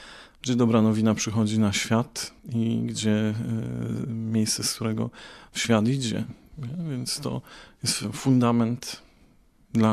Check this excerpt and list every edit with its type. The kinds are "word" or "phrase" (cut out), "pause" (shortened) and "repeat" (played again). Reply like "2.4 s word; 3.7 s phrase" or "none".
2.4 s pause